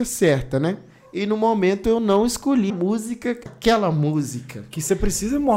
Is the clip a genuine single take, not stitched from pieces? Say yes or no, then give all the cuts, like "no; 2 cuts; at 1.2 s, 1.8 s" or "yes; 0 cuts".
no; 2 cuts; at 2.7 s, 3.5 s